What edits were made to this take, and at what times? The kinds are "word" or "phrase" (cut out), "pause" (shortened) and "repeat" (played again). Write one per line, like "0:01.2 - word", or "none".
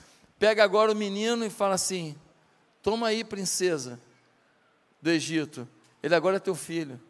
none